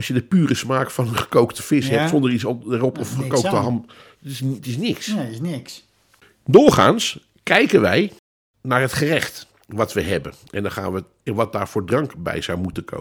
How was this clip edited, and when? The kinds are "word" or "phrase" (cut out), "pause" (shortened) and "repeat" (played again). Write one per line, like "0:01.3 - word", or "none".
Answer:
0:11.3 - word